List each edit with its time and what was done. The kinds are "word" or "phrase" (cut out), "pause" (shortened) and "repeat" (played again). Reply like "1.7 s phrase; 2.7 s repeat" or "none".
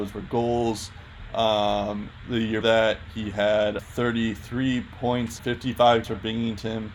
2.6 s word; 3.8 s word; 5.4 s word; 6.0 s word